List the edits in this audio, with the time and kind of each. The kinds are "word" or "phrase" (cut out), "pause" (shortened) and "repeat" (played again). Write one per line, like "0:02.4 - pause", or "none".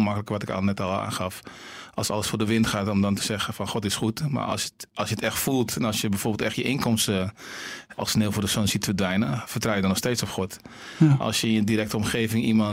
0:08.0 - word